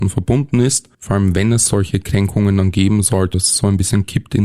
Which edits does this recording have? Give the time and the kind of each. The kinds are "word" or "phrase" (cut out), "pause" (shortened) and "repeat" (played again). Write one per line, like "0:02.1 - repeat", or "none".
0:00.9 - pause
0:03.3 - word